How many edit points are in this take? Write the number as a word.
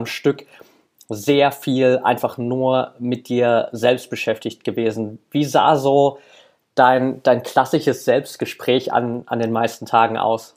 zero